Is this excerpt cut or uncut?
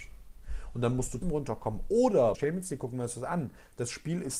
cut